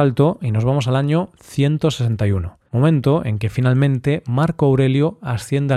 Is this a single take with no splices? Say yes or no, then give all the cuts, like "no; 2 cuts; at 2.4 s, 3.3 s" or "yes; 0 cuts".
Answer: no; 1 cut; at 2.7 s